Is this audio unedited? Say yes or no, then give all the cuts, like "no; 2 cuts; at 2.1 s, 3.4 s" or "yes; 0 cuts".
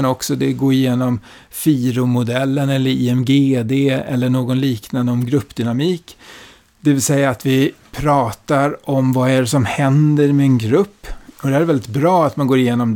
yes; 0 cuts